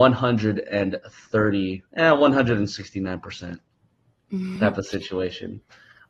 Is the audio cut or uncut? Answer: cut